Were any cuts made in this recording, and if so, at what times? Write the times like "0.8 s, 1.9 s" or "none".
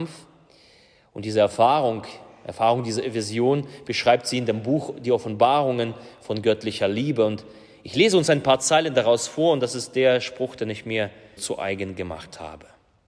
11.4 s